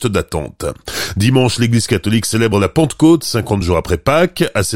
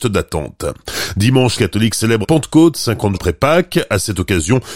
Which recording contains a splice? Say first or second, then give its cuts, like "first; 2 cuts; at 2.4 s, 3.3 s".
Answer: second; 3 cuts; at 1.6 s, 2.2 s, 3.1 s